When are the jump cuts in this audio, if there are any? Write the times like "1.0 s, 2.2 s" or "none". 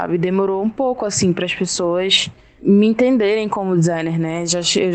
none